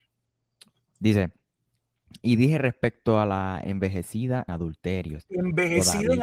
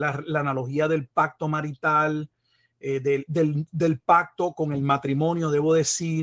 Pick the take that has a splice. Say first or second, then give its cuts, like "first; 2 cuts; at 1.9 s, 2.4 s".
first; 1 cut; at 4.5 s